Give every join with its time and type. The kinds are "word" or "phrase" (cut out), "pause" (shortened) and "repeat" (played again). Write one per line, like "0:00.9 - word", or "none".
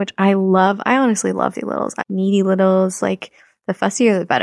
0:01.5 - word
0:02.0 - word